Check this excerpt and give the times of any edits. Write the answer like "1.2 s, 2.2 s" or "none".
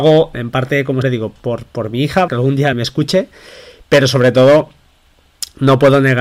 1.0 s, 1.4 s, 2.3 s, 2.7 s